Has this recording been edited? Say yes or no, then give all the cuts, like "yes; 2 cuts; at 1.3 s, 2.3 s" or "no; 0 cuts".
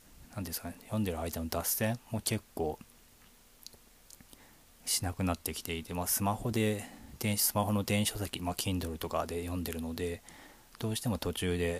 no; 0 cuts